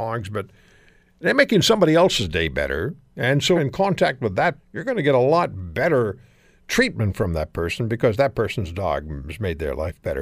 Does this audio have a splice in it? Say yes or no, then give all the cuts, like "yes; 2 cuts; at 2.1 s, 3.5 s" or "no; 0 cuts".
yes; 2 cuts; at 3.6 s, 4.6 s